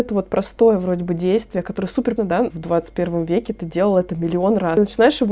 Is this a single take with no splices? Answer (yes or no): no